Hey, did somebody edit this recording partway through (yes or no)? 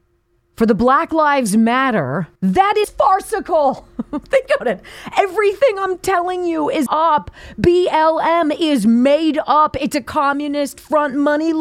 yes